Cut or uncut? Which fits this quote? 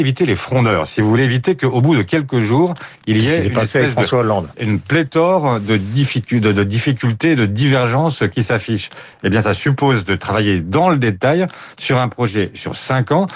uncut